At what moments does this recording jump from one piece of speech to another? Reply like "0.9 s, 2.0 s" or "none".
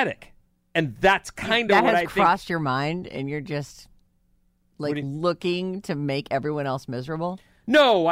none